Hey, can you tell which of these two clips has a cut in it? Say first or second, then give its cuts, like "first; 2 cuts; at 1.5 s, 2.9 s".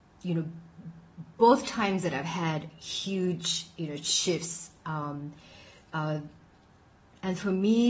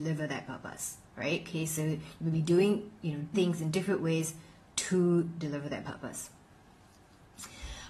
second; 2 cuts; at 1.1 s, 3.3 s